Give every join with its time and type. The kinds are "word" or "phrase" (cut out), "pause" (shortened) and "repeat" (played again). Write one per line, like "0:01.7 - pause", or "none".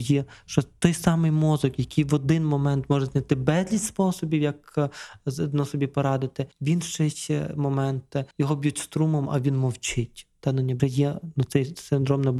0:06.5 - pause
0:08.3 - pause
0:10.8 - phrase